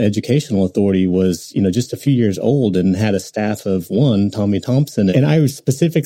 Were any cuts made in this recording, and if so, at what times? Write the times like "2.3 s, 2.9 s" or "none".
5.1 s